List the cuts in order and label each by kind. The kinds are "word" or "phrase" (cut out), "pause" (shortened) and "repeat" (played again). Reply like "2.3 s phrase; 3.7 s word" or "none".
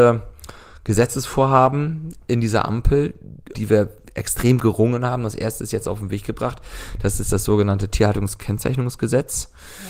3.5 s word